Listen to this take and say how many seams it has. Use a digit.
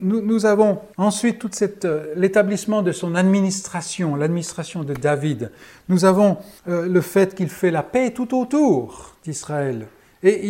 2